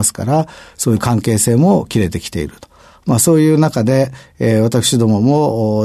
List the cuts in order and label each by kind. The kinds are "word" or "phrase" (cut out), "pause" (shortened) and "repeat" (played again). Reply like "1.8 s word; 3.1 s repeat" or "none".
none